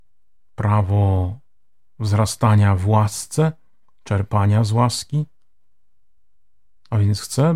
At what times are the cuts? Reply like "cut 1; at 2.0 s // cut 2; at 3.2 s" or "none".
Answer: none